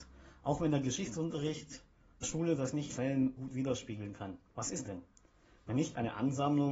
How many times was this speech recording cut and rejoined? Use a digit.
5